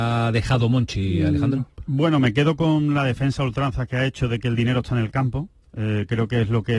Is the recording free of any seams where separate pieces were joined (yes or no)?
yes